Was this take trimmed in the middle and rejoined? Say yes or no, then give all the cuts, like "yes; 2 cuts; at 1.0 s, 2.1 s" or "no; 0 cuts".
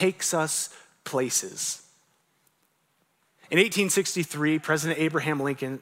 no; 0 cuts